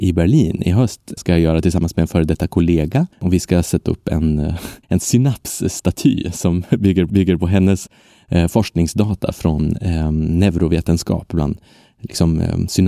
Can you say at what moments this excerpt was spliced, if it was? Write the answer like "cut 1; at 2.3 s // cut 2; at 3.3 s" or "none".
cut 1; at 1.2 s // cut 2; at 3.1 s // cut 3; at 4.8 s // cut 4; at 7.1 s